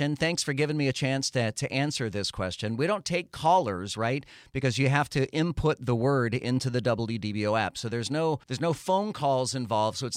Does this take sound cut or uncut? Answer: cut